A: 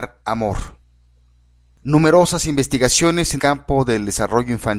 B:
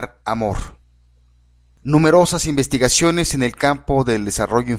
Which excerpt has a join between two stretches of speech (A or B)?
A